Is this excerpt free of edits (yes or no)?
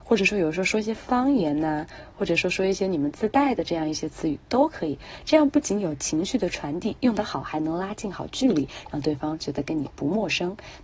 yes